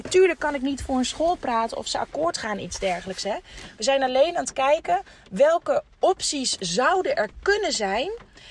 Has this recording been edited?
no; 0 cuts

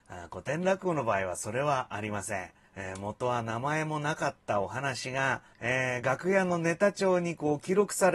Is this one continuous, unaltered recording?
no; 2 cuts; at 2.6 s, 5.5 s

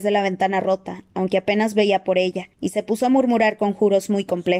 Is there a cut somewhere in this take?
yes; 1 cut; at 2.5 s

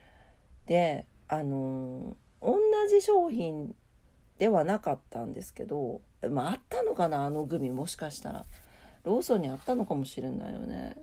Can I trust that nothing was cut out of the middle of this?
yes; 0 cuts

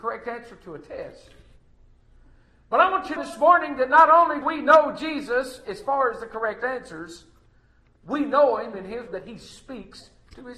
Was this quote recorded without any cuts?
no; 3 cuts; at 3.2 s, 4.4 s, 9.1 s

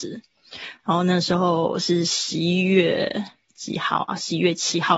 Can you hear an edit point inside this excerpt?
no; 0 cuts

